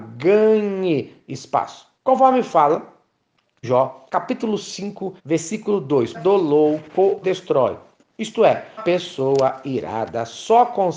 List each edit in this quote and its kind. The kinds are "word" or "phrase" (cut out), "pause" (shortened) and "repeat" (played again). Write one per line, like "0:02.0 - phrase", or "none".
0:01.9 - pause
0:03.6 - word
0:04.1 - pause
0:05.2 - pause
0:06.1 - phrase
0:07.2 - word
0:08.8 - word